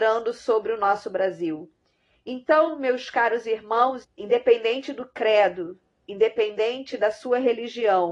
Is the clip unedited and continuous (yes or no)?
no